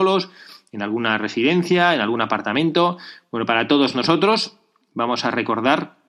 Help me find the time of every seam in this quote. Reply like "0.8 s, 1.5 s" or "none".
none